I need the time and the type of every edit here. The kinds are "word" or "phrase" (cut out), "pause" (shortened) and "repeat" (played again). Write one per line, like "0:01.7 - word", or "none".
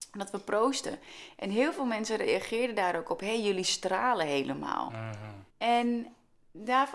0:05.5 - pause